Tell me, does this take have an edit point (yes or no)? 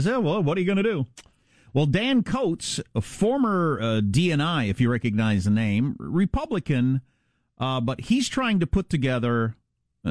no